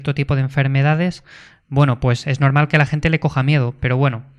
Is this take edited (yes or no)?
no